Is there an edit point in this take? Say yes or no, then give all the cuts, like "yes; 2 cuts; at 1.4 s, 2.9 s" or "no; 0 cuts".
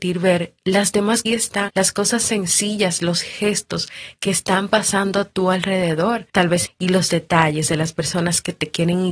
yes; 4 cuts; at 1.3 s, 1.7 s, 6.3 s, 6.6 s